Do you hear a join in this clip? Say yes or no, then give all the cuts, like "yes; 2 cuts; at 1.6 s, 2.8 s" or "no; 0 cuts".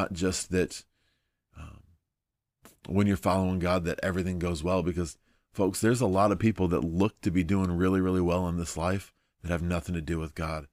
no; 0 cuts